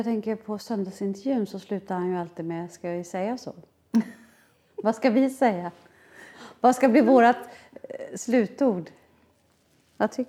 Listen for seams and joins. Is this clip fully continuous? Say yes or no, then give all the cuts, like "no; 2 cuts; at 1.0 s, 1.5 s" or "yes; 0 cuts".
yes; 0 cuts